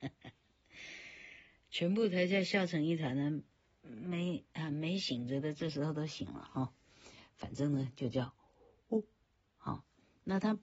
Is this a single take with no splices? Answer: yes; 0 cuts

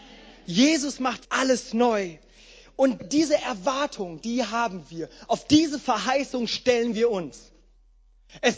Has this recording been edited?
yes; 2 cuts; at 1.2 s, 3.0 s

